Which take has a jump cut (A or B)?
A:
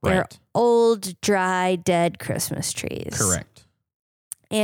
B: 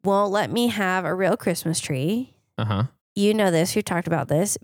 B